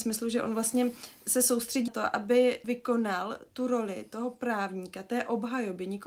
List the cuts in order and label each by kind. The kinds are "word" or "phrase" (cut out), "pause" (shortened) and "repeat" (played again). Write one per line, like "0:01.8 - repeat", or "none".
0:01.9 - word
0:02.6 - word

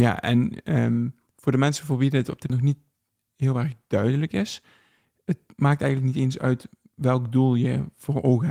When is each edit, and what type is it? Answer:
0:02.5 - word

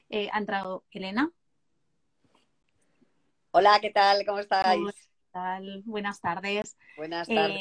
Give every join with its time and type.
none

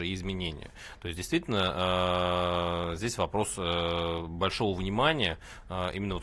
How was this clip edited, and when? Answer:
none

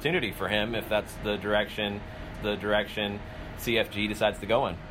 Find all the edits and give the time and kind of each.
0:02.3 - repeat

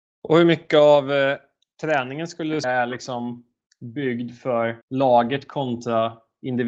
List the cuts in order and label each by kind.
0:02.6 - word
0:04.8 - pause

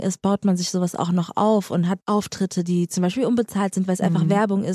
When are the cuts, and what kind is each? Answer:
none

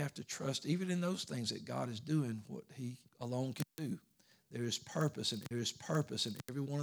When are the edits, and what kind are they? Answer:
0:03.1 - pause
0:05.5 - repeat

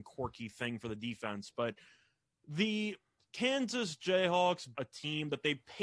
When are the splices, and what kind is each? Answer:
0:04.7 - word

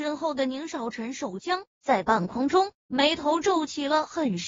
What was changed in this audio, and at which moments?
none

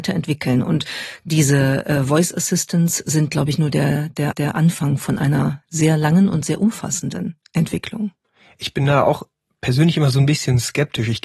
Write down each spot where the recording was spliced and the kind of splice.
0:04.3 - repeat

